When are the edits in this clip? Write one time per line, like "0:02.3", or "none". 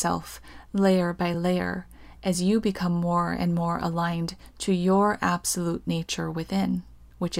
none